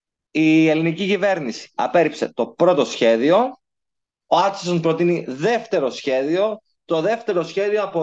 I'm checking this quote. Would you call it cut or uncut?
uncut